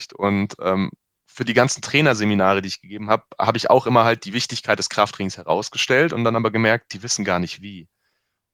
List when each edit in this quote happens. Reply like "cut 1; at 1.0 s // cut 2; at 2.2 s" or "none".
none